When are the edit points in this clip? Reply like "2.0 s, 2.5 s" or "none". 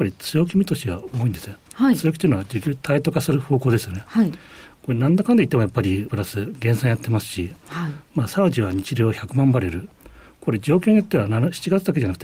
6.1 s